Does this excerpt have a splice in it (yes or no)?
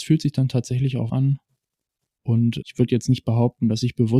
yes